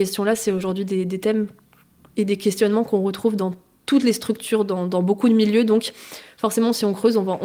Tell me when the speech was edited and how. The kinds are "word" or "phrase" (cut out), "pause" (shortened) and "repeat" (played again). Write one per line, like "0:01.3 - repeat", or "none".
none